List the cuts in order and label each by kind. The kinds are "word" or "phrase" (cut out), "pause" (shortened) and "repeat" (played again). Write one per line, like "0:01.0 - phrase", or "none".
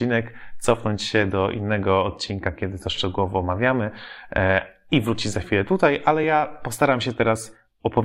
none

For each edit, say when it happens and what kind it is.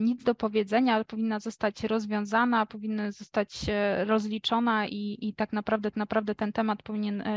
0:05.9 - repeat

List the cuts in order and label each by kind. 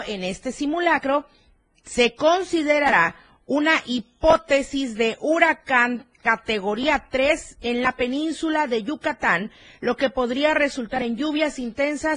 none

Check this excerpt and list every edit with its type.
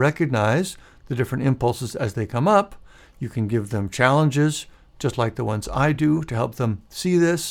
none

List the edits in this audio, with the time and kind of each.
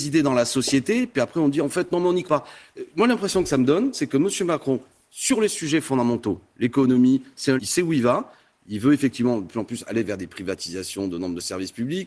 0:02.2 - word
0:03.9 - word
0:07.6 - word

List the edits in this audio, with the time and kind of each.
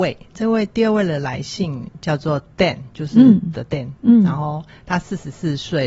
0:03.5 - word

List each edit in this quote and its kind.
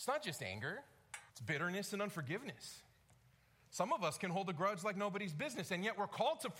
0:01.3 - pause

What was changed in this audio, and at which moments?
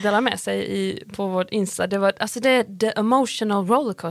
none

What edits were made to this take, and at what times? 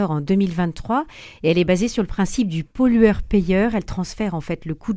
none

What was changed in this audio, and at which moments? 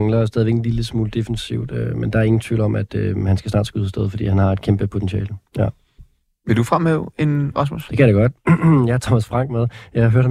0:05.5 - pause
0:07.5 - word
0:09.0 - word

